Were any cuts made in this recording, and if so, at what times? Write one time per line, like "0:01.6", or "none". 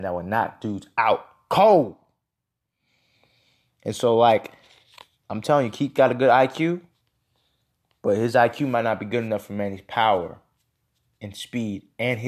none